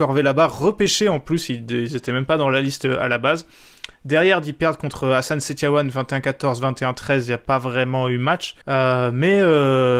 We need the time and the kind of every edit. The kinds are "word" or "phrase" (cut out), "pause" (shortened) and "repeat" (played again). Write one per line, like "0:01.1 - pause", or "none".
0:08.6 - pause